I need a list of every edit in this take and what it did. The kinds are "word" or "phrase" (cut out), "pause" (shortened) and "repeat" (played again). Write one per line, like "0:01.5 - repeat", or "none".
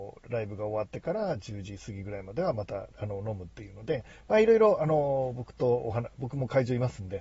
none

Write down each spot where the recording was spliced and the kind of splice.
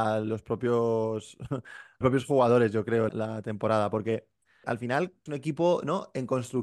0:02.0 - word
0:03.1 - word
0:04.6 - word
0:05.3 - word

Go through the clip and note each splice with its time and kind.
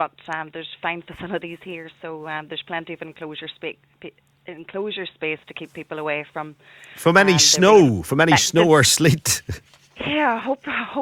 none

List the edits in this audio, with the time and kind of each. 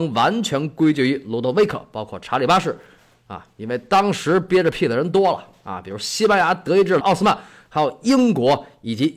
0:07.0 - phrase

